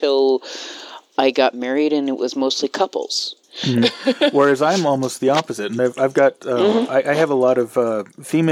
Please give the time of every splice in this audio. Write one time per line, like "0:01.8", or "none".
0:03.4